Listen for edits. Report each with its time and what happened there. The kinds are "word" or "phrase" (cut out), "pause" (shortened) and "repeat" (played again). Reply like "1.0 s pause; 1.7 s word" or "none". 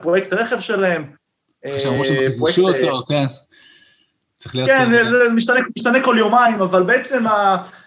none

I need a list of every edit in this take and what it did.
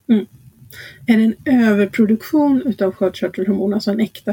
none

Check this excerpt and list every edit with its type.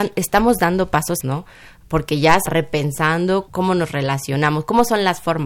1.2 s word; 2.5 s word; 3.5 s word

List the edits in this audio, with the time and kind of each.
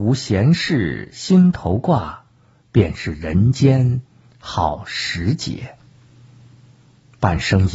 none

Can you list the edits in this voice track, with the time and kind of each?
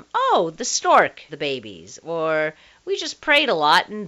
1.3 s word

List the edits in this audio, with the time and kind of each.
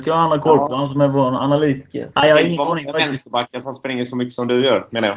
2.1 s pause

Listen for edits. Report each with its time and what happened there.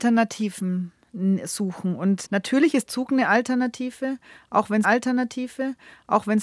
2.2 s word; 2.9 s word; 4.8 s repeat

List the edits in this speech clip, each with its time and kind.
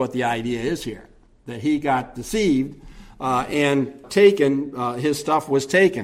4.0 s word

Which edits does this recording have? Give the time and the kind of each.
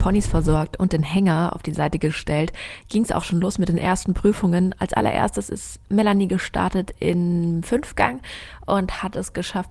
none

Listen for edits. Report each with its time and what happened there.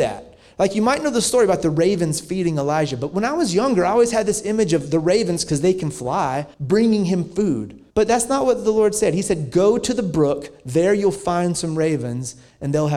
6.5 s pause; 7.9 s pause

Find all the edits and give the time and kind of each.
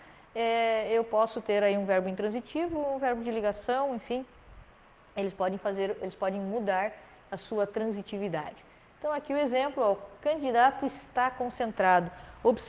none

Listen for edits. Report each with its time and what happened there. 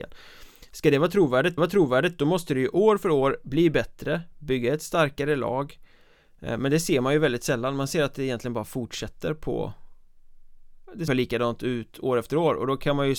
1.6 s repeat; 11.1 s word

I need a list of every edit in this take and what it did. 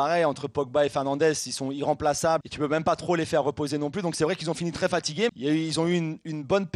2.4 s word; 5.3 s word

